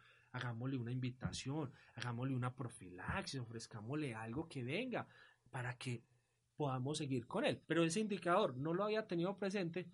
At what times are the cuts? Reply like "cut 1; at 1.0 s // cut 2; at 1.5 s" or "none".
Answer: cut 1; at 7.6 s